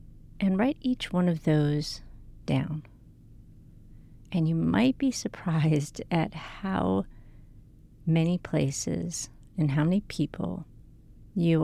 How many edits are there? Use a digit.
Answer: 0